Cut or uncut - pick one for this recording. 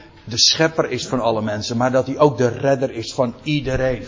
uncut